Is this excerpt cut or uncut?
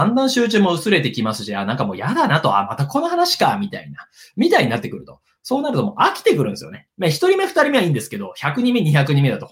uncut